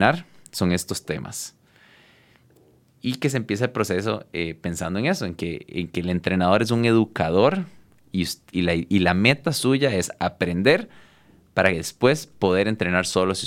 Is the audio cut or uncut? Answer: uncut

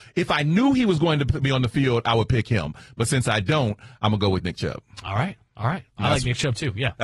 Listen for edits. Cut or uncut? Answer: uncut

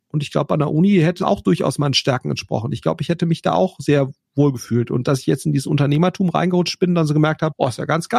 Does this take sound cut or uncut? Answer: cut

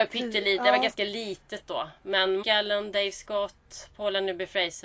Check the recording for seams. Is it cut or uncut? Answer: cut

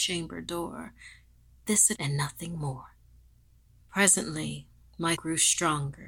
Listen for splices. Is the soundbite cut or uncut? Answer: cut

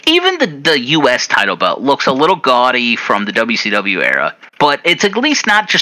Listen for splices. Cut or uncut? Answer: cut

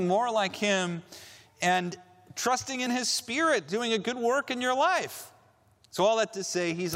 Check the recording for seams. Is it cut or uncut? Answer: uncut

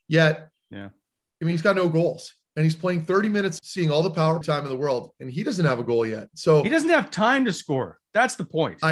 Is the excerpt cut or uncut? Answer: cut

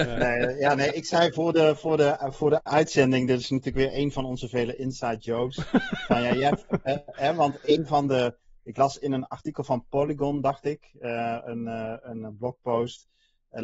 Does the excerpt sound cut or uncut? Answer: uncut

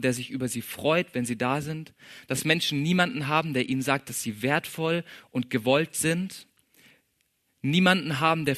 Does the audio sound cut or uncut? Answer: uncut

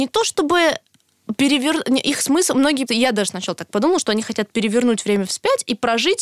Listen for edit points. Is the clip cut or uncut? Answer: cut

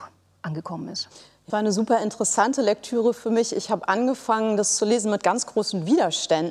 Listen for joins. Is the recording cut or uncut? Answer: cut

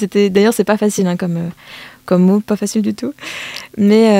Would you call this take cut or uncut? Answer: uncut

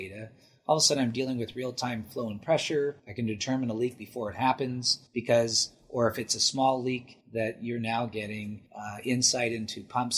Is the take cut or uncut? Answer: cut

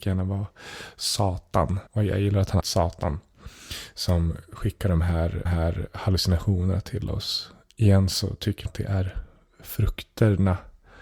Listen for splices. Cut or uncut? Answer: cut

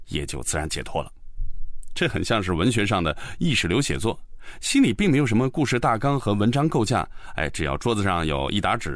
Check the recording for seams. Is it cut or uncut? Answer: uncut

